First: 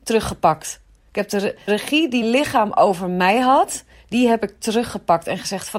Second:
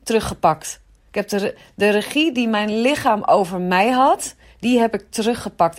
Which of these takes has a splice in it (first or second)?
first